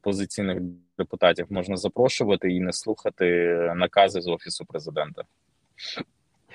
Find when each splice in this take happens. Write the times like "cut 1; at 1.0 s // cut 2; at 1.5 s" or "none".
none